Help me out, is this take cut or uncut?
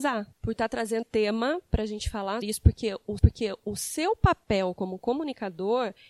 cut